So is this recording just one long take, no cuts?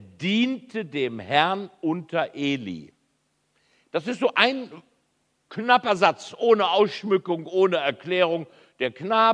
yes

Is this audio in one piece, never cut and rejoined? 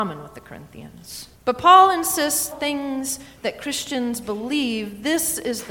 no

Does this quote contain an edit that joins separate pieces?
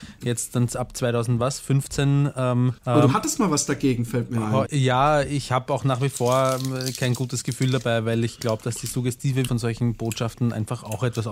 yes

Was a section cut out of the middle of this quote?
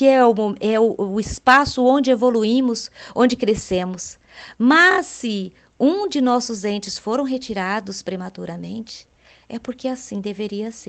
no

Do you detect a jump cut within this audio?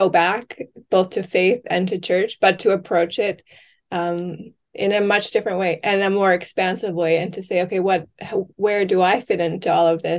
no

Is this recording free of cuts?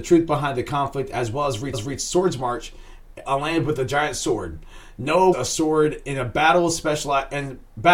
no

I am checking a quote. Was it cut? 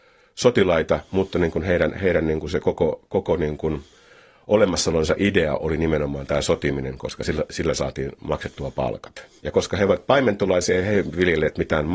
no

